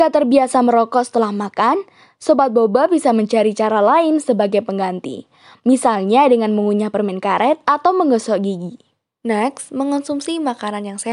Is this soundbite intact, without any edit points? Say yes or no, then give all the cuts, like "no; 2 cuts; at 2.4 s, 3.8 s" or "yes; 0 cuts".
yes; 0 cuts